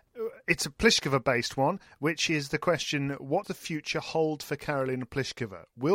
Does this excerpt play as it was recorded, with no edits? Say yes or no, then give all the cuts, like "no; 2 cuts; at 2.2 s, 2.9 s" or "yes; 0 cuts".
no; 1 cut; at 3.4 s